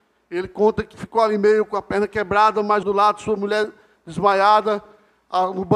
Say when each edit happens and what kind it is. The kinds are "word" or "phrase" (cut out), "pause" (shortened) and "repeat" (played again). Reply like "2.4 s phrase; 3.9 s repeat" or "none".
0.9 s word; 2.8 s word